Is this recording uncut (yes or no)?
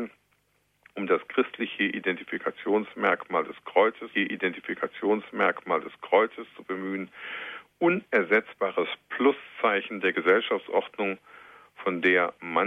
no